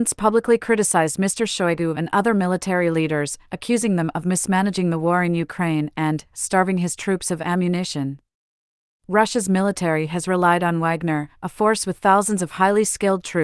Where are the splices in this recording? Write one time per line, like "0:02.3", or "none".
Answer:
none